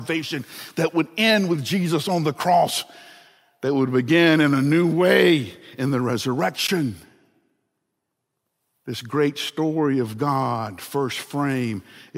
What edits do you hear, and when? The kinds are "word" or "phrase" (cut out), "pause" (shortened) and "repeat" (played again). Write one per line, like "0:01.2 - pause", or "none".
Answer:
none